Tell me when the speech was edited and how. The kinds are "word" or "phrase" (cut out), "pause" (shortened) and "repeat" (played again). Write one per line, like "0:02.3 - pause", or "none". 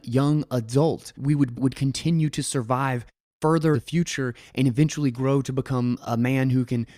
0:01.2 - word
0:01.5 - word
0:03.7 - word